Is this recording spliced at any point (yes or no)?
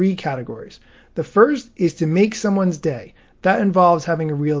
no